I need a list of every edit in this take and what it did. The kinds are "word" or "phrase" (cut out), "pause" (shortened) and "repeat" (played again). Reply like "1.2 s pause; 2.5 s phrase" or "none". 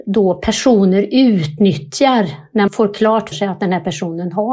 2.7 s word; 3.3 s word